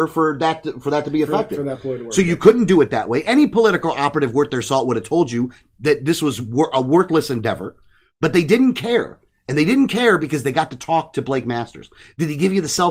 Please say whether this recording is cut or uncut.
uncut